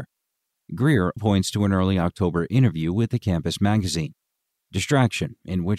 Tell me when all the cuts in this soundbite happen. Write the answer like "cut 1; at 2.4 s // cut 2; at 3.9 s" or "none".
cut 1; at 1.2 s